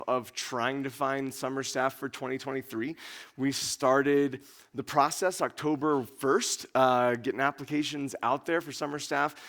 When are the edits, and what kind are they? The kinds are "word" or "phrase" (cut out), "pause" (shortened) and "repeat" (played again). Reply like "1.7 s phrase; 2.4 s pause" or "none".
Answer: none